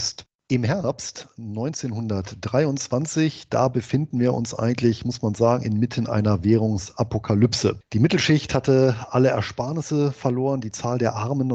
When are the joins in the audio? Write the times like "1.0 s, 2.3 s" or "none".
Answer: none